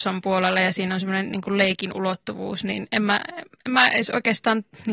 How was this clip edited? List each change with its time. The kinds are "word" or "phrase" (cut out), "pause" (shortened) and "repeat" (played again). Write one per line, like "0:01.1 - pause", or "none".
none